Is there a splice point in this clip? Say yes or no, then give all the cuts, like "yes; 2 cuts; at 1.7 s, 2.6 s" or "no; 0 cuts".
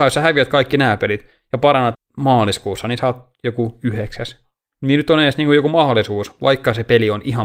yes; 1 cut; at 1.9 s